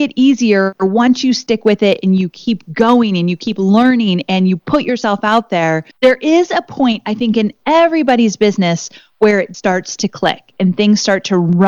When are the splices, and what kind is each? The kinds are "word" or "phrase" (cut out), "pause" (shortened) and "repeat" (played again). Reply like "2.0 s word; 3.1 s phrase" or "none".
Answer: 5.9 s pause; 9.5 s word

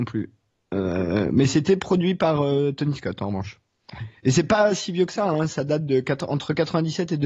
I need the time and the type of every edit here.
none

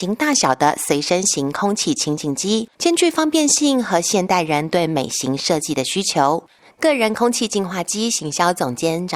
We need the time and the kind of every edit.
2.7 s pause

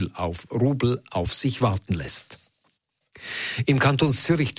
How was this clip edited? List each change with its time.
none

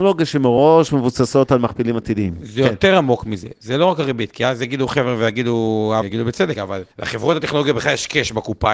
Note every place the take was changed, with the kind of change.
6.0 s word; 6.5 s word; 6.9 s pause

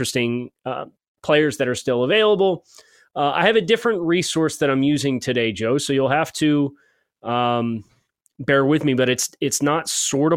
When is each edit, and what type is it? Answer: none

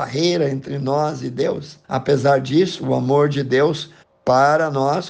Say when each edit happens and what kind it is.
1.8 s pause; 4.0 s pause

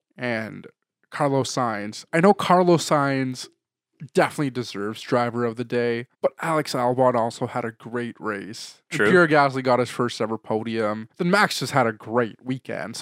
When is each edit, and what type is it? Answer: 6.1 s pause; 11.1 s pause

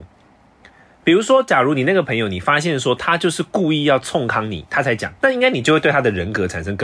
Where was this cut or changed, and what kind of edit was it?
5.2 s pause

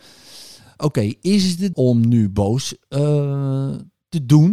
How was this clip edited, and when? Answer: 1.7 s word

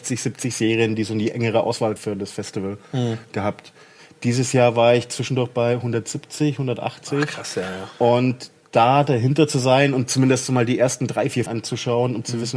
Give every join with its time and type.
2.0 s word; 11.5 s word

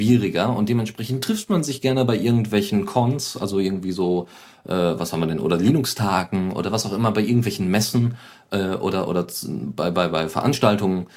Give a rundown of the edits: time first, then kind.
none

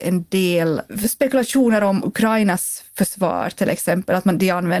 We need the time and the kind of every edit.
2.0 s word

